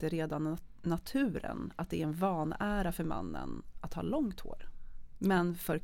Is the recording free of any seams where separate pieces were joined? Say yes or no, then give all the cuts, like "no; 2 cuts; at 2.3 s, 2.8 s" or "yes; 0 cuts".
yes; 0 cuts